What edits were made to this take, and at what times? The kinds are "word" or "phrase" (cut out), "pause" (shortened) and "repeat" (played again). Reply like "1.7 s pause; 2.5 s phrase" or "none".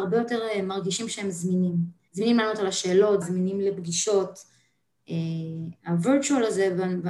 2.1 s pause; 3.2 s phrase